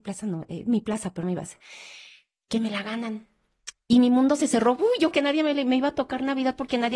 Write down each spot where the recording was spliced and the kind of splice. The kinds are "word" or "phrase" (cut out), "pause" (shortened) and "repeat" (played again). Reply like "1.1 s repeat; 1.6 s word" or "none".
1.2 s word; 5.1 s word